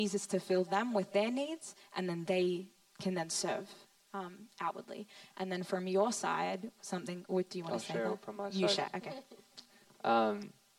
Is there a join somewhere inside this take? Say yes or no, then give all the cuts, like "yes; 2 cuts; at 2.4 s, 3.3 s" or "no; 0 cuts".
no; 0 cuts